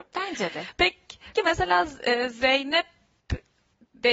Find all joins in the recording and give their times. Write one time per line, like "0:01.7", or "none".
0:01.4